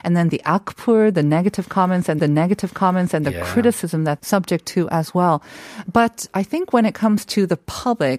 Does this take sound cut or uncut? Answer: cut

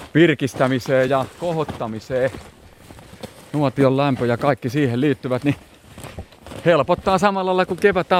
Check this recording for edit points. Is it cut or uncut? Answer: uncut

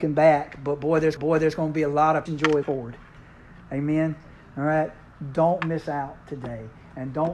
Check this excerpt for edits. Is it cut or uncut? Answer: cut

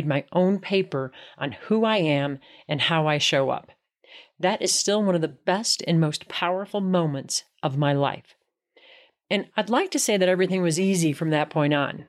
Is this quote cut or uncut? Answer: uncut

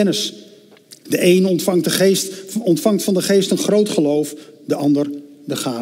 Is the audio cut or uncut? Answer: uncut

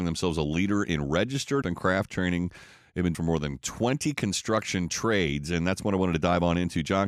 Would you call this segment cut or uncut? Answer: cut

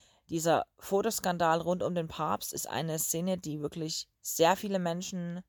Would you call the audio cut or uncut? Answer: cut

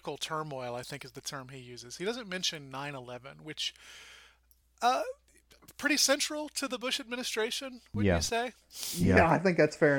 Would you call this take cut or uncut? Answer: uncut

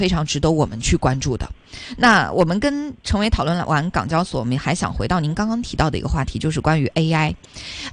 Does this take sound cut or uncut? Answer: uncut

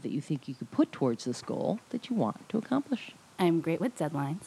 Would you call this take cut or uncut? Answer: uncut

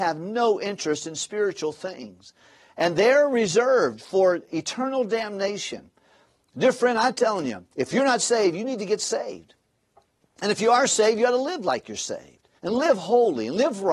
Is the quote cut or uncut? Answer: cut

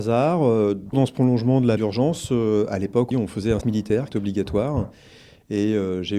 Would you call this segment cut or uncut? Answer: cut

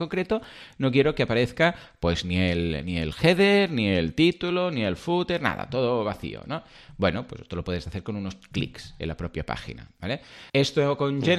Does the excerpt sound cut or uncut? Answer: cut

